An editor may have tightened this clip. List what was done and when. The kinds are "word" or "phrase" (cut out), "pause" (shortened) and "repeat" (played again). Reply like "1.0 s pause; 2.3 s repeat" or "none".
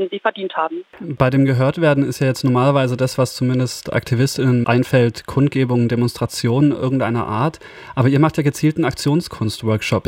4.6 s word